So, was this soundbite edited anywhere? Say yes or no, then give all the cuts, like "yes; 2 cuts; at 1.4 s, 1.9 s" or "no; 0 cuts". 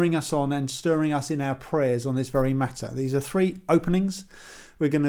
no; 0 cuts